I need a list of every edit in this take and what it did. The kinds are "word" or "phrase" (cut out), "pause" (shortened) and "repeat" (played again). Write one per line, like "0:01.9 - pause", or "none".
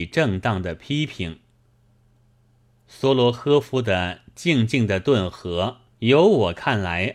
0:05.9 - pause